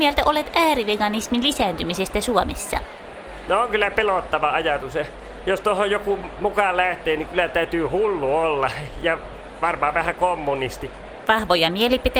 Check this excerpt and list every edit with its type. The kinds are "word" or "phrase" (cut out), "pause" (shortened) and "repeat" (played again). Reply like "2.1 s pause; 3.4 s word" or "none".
none

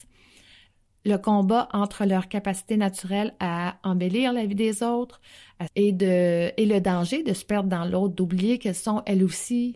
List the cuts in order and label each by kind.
5.7 s phrase

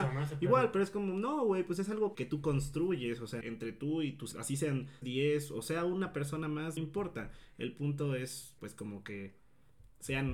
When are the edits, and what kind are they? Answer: 2.1 s word; 3.4 s word; 4.3 s word; 5.0 s word; 6.8 s word; 8.6 s word

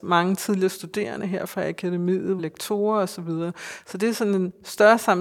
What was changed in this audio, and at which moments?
2.4 s phrase

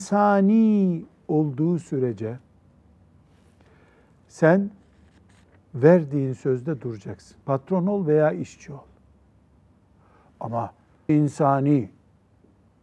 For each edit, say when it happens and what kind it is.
7.4 s pause; 11.1 s word

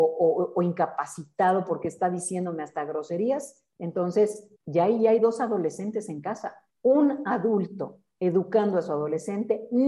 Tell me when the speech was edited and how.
4.5 s pause; 6.7 s pause; 8.1 s pause

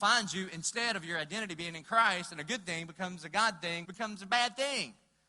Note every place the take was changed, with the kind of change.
3.8 s word

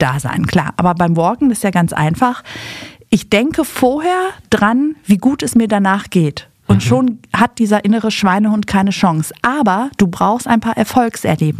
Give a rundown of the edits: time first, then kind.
none

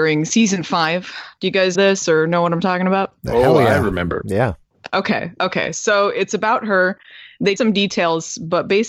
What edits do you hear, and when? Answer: 1.7 s word; 7.6 s word

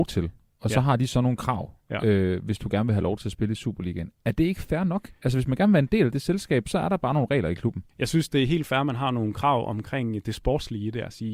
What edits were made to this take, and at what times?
7.9 s pause

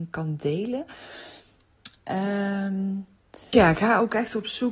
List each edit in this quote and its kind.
3.5 s word

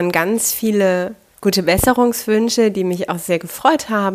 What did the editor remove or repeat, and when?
1.3 s pause

